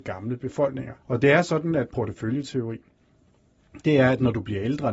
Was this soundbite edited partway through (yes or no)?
yes